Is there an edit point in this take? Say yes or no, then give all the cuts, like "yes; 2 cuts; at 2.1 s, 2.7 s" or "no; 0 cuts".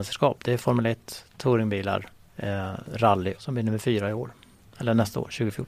yes; 2 cuts; at 2.1 s, 3.4 s